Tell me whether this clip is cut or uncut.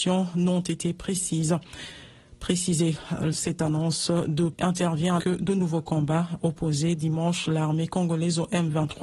cut